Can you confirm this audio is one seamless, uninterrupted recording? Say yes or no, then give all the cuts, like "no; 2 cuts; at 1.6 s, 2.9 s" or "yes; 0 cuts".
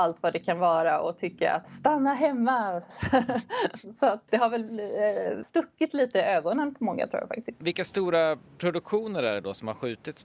no; 3 cuts; at 1.6 s, 4.3 s, 5.4 s